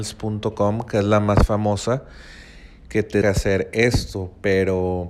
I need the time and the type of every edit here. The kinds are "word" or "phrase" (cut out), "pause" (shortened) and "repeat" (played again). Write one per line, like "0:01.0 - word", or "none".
0:03.2 - word